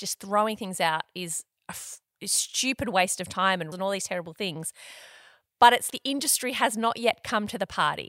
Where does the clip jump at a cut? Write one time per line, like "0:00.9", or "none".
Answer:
0:03.7
0:05.9